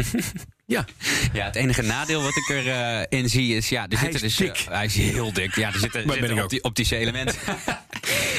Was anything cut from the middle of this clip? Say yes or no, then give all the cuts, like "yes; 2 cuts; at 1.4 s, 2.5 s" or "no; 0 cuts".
no; 0 cuts